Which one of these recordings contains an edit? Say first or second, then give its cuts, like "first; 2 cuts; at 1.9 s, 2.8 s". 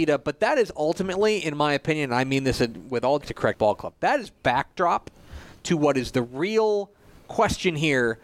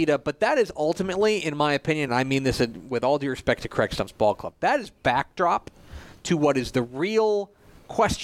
first; 2 cuts; at 3.2 s, 3.5 s